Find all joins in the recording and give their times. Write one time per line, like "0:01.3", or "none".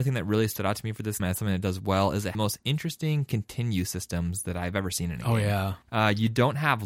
0:01.2
0:02.3
0:05.8